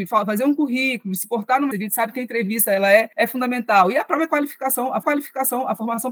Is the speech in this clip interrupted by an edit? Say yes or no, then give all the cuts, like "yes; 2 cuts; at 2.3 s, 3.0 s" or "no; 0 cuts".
yes; 3 cuts; at 1.7 s, 3.1 s, 5.0 s